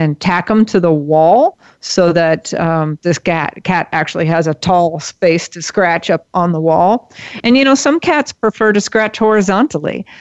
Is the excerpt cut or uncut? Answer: uncut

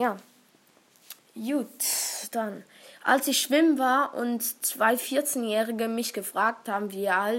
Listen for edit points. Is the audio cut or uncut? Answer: cut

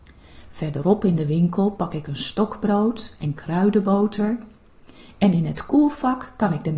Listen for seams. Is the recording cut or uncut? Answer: uncut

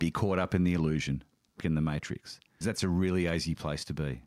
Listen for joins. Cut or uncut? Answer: cut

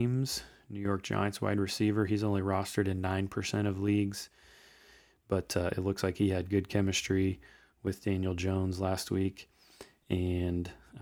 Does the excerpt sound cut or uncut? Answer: uncut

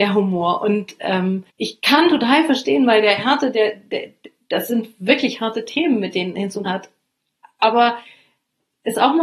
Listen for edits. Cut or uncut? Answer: cut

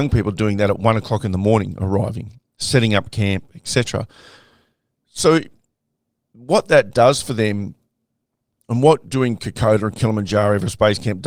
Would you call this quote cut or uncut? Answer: uncut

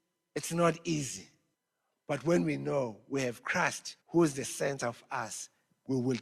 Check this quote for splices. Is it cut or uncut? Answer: cut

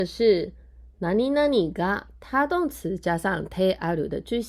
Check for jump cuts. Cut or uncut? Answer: uncut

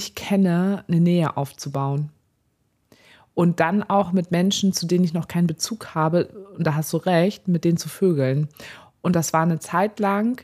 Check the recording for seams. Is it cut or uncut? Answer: uncut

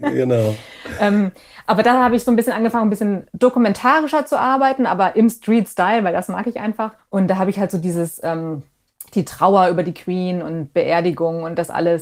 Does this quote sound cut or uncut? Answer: cut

